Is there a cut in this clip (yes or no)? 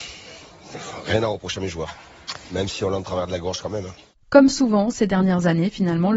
no